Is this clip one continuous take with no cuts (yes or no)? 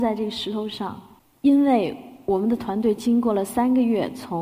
yes